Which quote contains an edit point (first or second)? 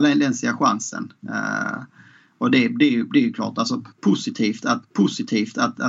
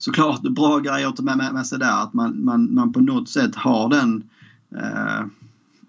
first